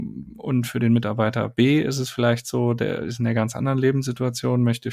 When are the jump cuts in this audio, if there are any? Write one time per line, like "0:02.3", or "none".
none